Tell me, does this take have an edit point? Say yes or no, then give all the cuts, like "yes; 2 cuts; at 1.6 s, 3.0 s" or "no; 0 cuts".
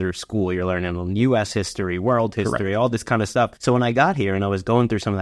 yes; 1 cut; at 3.6 s